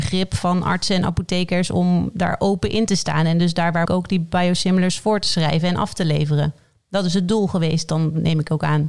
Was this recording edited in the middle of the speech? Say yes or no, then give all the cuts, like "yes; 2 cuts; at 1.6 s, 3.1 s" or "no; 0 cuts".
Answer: yes; 1 cut; at 3.8 s